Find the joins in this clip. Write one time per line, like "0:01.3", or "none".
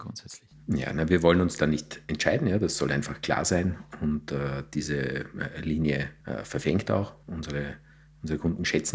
none